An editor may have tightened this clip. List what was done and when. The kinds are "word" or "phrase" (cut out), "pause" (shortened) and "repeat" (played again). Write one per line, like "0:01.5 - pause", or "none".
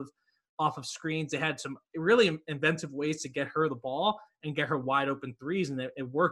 none